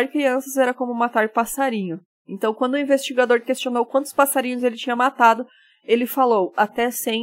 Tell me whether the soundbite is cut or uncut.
uncut